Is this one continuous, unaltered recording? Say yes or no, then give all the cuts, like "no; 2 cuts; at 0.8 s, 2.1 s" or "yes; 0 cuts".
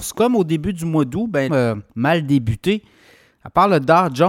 no; 2 cuts; at 1.5 s, 1.9 s